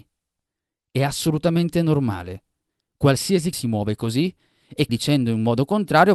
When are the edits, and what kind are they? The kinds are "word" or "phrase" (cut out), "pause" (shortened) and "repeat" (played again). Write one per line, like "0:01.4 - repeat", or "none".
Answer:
0:03.5 - word
0:04.9 - phrase